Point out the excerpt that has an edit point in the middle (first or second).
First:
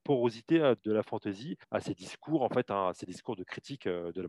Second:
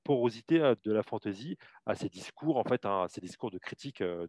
first